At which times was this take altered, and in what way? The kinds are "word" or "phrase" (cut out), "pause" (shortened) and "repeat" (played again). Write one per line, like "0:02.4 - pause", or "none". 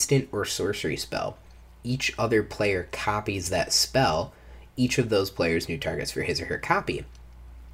0:05.7 - phrase